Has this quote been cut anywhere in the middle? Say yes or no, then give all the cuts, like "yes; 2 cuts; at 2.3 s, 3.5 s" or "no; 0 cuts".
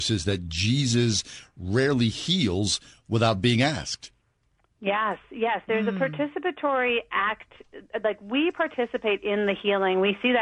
no; 0 cuts